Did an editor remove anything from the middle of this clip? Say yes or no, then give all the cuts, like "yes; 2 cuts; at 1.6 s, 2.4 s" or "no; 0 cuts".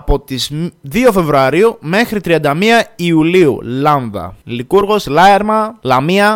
no; 0 cuts